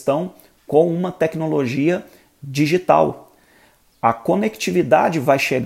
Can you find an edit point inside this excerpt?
no; 0 cuts

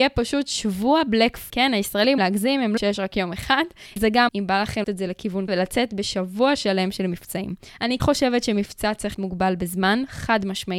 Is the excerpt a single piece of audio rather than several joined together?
no; 9 cuts; at 1.5 s, 2.2 s, 2.8 s, 4.0 s, 4.3 s, 4.8 s, 5.5 s, 8.0 s, 9.1 s

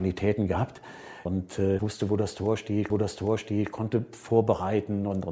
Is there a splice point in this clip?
yes; 2 cuts; at 1.8 s, 2.9 s

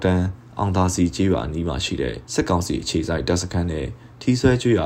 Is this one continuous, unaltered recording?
no; 1 cut; at 2.2 s

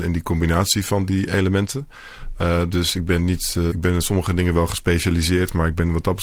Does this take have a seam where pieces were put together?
yes; 1 cut; at 3.7 s

